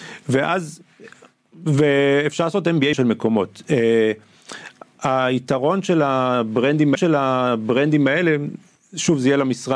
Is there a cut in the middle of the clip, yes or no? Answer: yes